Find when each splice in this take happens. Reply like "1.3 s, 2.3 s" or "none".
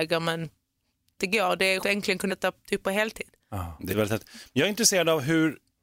1.2 s, 1.8 s, 2.3 s, 3.9 s